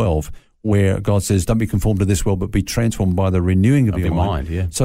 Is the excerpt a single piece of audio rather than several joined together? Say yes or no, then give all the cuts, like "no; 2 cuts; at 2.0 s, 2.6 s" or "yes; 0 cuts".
yes; 0 cuts